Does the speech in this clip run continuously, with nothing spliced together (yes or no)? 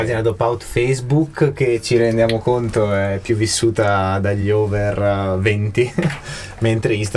yes